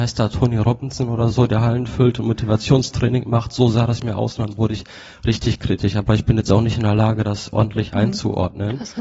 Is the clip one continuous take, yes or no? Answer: yes